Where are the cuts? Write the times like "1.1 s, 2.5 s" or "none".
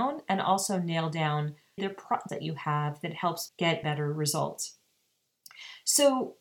1.8 s, 2.3 s, 3.5 s, 3.8 s